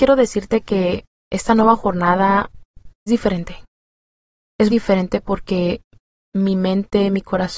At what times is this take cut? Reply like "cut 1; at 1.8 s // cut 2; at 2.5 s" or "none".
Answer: cut 1; at 3.1 s // cut 2; at 4.7 s